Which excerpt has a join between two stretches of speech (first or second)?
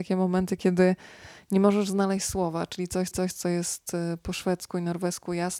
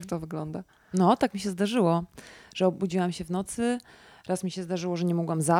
first